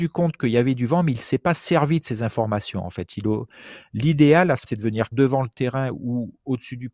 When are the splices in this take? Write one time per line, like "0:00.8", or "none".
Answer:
0:04.7
0:05.1